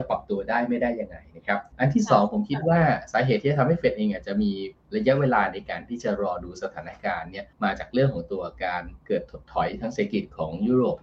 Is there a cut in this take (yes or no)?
yes